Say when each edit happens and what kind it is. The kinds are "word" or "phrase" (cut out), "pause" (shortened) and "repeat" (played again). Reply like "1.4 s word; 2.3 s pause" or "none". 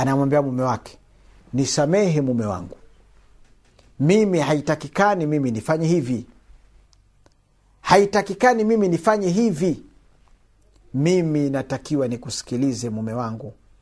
none